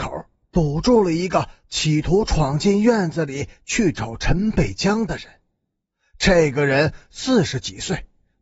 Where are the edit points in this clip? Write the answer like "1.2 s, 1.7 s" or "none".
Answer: none